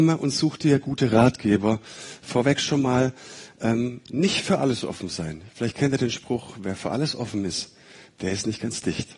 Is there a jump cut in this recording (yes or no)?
no